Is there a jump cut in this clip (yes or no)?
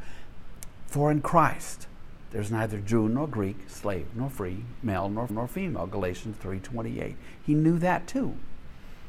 yes